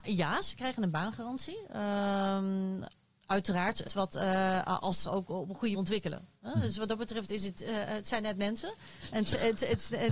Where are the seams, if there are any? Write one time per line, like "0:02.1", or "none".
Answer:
0:03.9
0:05.0
0:05.7